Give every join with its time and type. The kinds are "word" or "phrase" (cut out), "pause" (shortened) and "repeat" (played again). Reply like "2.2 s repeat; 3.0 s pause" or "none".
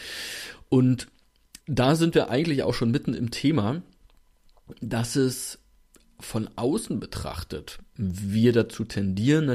1.6 s pause